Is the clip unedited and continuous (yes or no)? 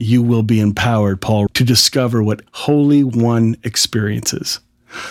no